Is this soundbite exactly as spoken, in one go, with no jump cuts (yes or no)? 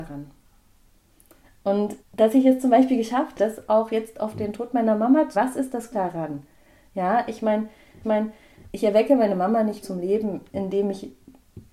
no